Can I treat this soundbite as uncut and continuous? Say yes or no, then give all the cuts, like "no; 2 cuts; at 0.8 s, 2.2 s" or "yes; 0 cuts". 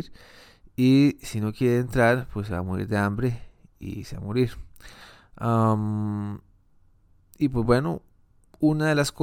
yes; 0 cuts